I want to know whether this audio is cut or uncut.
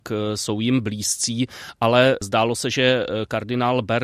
uncut